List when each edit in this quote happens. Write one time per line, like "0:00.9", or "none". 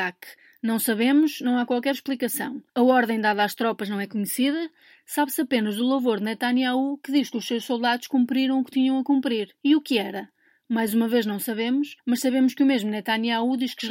0:02.7
0:09.6
0:12.0